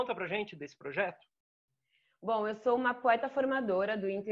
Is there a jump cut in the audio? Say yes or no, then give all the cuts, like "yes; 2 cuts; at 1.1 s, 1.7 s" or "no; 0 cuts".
no; 0 cuts